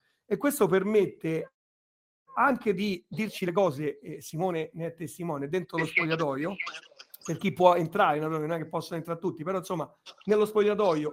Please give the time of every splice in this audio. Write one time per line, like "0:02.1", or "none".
none